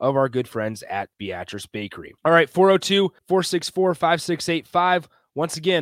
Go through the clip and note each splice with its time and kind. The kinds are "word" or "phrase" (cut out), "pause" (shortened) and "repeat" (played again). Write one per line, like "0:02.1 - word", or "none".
0:01.1 - pause
0:02.2 - pause
0:03.2 - pause